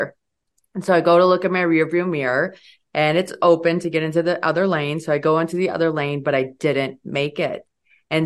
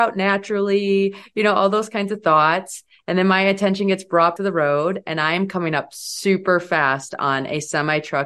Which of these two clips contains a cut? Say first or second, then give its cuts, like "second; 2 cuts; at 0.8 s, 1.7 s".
second; 1 cut; at 4.4 s